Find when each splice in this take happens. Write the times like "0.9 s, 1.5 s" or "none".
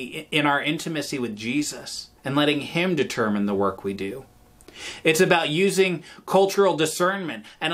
2.2 s

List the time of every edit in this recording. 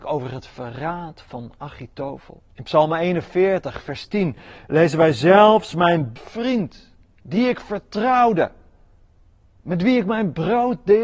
2.5 s, 6.2 s

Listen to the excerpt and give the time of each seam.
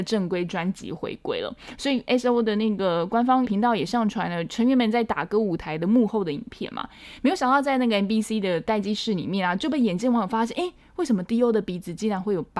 3.4 s

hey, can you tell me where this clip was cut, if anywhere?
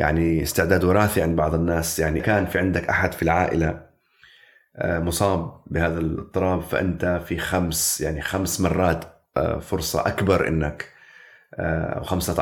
2.2 s

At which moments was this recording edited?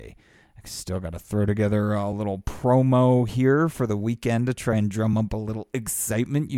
none

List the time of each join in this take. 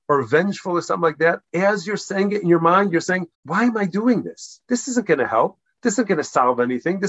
1.5 s, 3.3 s, 4.6 s

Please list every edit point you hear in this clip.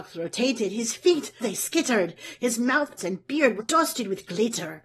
1.4 s, 3.0 s, 3.6 s

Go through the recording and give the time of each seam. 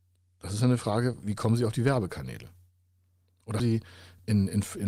1.2 s, 3.6 s

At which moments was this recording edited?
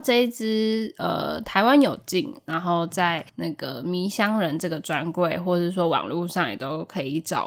3.3 s

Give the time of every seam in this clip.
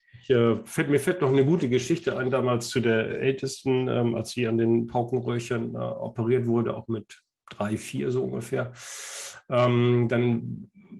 none

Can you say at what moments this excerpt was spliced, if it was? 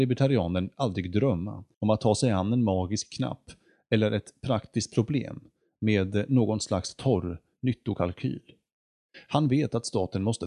1.7 s

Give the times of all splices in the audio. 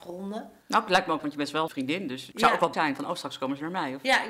1.2 s, 1.7 s, 2.3 s, 2.7 s

